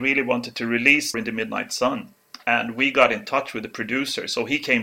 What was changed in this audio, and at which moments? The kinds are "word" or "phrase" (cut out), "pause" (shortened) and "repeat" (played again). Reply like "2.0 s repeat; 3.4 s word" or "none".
1.1 s word

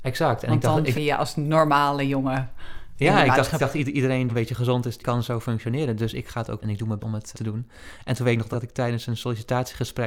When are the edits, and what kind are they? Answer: 0.9 s word; 3.6 s word; 4.3 s word; 5.0 s word; 6.6 s word; 7.0 s word; 7.3 s word; 8.5 s word

